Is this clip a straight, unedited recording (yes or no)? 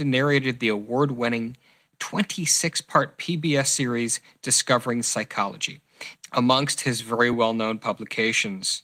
yes